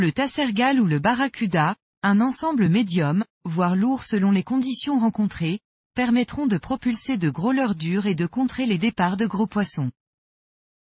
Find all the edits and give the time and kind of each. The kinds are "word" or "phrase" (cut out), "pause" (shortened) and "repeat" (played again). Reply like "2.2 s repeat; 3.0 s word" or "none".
none